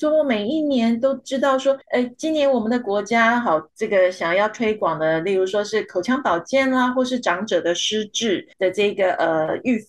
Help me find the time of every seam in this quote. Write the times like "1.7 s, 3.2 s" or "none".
1.8 s, 3.7 s, 8.5 s

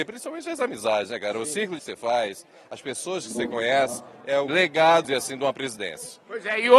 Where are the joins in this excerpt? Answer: 1.8 s, 4.5 s, 5.0 s

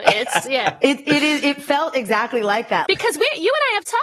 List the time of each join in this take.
none

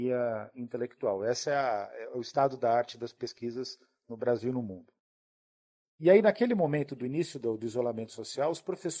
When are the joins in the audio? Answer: none

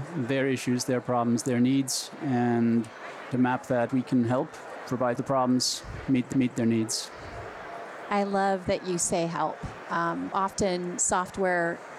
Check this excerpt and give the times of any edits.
3.3 s, 3.9 s, 5.2 s, 6.3 s, 10.3 s

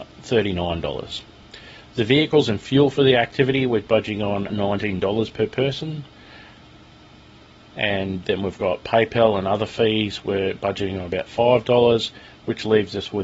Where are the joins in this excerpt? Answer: 4.5 s, 8.2 s

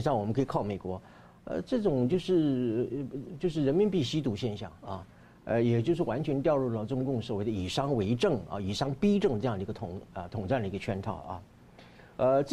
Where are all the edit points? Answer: none

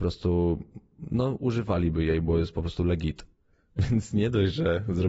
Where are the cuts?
none

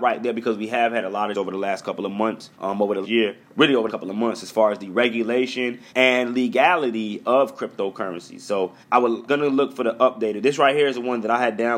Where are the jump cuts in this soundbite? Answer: 1.3 s, 2.5 s, 3.0 s, 3.9 s, 5.9 s, 8.8 s, 9.3 s

